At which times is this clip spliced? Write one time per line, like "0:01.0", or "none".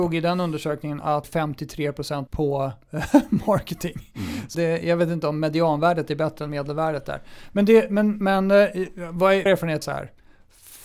0:01.2
0:02.3
0:04.5
0:09.5
0:09.8